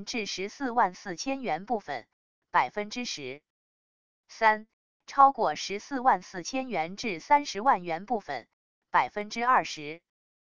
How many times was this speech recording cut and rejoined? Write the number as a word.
zero